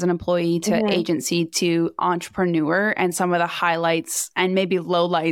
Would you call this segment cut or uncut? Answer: uncut